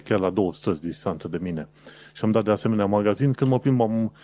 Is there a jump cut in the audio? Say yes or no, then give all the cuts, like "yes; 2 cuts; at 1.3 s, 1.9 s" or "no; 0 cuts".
no; 0 cuts